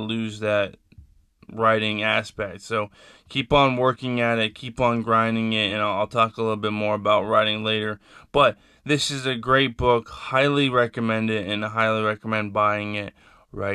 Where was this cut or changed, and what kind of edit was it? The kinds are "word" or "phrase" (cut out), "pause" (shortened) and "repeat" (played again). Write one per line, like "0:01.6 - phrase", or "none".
none